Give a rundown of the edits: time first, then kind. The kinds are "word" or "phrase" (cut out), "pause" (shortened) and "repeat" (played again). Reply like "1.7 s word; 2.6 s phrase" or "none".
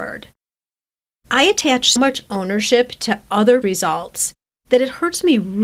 2.0 s word; 3.6 s word